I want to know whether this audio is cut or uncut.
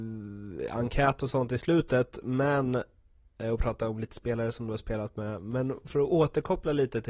uncut